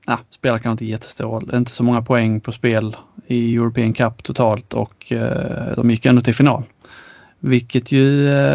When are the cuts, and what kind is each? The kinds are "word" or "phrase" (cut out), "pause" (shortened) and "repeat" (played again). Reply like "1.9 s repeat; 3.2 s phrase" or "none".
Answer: none